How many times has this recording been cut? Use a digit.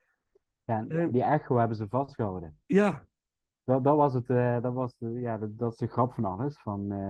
1